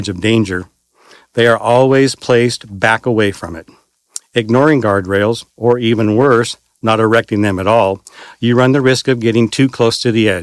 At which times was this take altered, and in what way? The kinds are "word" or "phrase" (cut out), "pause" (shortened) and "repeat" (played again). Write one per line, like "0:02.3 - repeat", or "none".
0:05.5 - pause